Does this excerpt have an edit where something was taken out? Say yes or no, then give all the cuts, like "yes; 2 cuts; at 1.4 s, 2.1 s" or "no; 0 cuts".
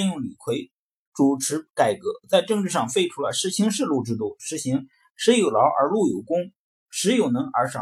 no; 0 cuts